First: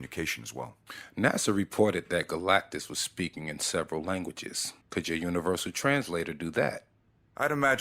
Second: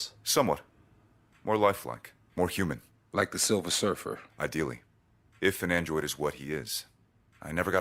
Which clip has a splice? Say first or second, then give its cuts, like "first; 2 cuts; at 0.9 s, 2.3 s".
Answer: first; 1 cut; at 4.8 s